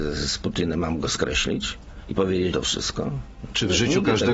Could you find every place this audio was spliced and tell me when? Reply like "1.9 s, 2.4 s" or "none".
2.5 s